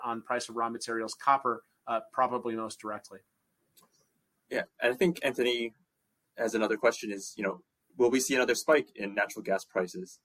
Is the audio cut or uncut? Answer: uncut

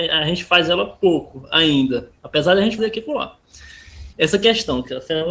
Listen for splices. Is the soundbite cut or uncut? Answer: cut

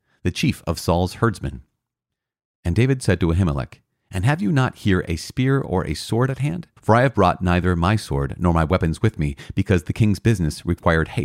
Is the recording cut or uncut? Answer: cut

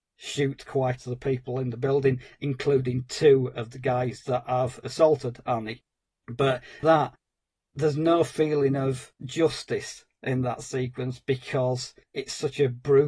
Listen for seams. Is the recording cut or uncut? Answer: cut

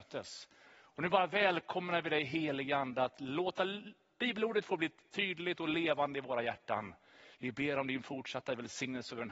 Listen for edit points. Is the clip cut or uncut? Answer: uncut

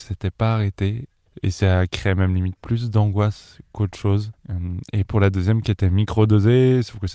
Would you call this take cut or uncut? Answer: cut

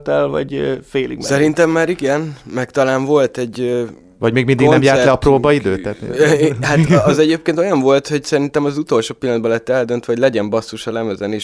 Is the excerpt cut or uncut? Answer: uncut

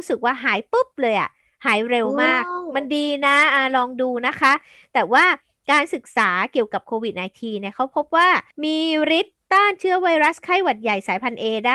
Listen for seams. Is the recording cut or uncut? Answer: cut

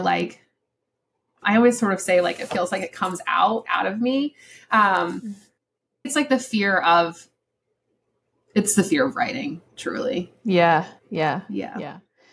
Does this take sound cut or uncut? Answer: cut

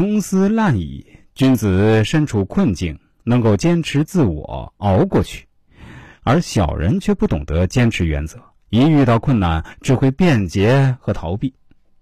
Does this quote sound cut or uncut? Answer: uncut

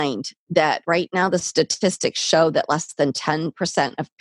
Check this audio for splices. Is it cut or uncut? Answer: uncut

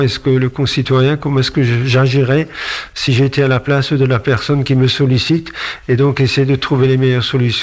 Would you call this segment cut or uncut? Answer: uncut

